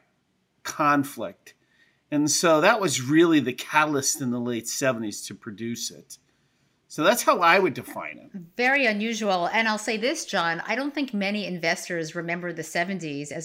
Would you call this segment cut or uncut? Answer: uncut